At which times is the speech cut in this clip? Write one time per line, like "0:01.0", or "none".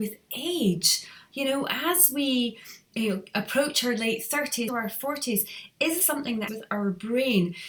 0:02.9
0:04.7
0:06.0
0:06.5